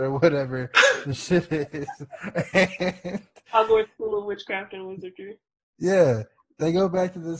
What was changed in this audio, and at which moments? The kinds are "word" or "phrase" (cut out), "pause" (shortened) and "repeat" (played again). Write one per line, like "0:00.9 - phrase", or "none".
none